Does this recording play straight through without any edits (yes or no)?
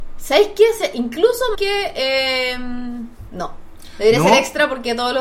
no